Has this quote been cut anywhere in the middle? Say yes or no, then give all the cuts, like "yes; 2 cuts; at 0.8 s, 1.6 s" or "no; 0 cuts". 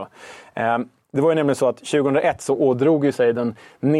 no; 0 cuts